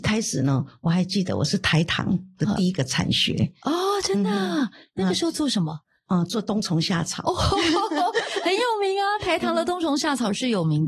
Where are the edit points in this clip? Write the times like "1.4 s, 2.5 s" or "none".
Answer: none